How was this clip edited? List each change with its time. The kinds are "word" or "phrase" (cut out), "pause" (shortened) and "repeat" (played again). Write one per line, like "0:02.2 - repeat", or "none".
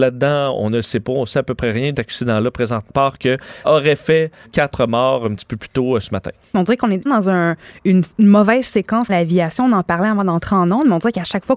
0:01.9 - word
0:02.9 - word
0:03.6 - word
0:04.4 - word
0:07.1 - word
0:09.1 - word

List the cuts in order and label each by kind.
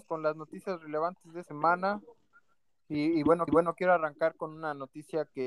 0:01.4 - word
0:03.5 - repeat

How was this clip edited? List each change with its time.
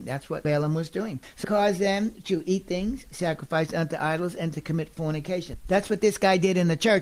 0:01.4 - word

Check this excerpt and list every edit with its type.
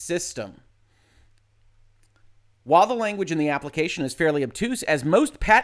none

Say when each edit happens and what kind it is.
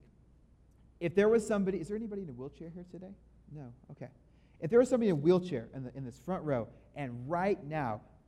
none

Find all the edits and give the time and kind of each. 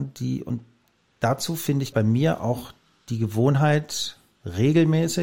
0:01.9 - word

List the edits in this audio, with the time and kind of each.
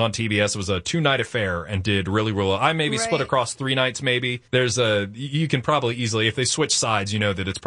0:04.5 - pause

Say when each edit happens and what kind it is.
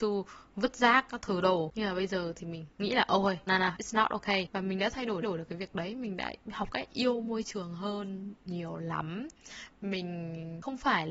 0:03.5 - word
0:05.2 - repeat

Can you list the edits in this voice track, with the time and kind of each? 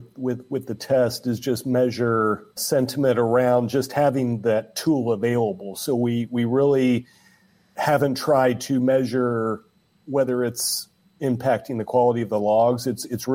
0:02.6 - word

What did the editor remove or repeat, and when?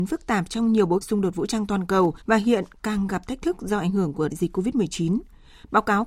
0:01.0 - word
0:02.2 - pause
0:04.3 - word

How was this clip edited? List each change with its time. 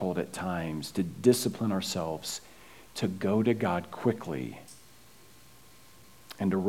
none

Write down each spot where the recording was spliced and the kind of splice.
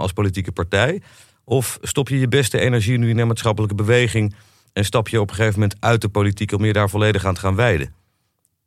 none

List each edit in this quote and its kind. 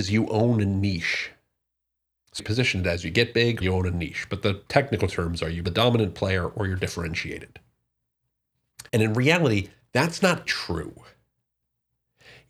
0:02.4 - phrase
0:03.6 - word
0:05.6 - word
0:08.9 - pause
0:09.8 - pause
0:10.5 - word

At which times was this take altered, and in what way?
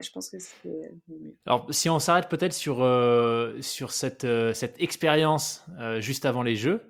0:01.4 - pause

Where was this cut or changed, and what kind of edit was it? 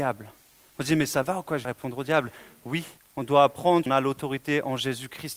0:01.6 - phrase
0:03.0 - pause
0:03.9 - word

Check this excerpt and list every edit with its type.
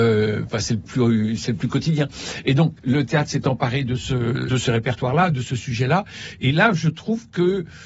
0:02.8 - pause
0:04.5 - word

